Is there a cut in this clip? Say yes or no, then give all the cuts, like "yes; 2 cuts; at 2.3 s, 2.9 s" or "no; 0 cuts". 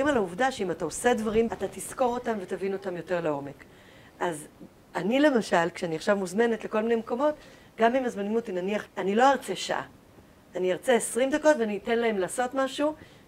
yes; 2 cuts; at 1.5 s, 8.9 s